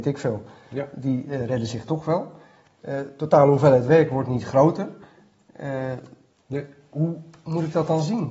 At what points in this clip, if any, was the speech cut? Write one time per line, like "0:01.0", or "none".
none